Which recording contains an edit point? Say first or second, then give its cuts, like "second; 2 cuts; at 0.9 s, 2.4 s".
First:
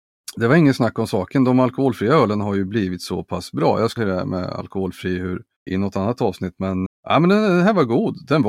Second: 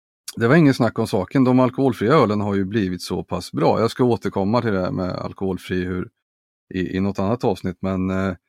first; 3 cuts; at 4.0 s, 5.7 s, 6.9 s